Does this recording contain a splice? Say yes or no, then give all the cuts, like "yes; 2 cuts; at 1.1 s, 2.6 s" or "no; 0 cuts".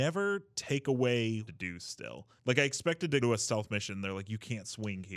yes; 3 cuts; at 1.5 s, 2.4 s, 3.2 s